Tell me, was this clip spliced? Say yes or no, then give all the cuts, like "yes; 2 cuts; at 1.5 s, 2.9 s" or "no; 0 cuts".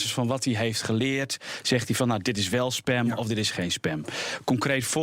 no; 0 cuts